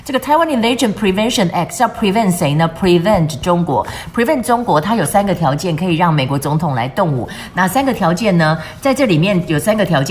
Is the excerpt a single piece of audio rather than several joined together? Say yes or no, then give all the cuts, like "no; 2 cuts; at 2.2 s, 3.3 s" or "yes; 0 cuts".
yes; 0 cuts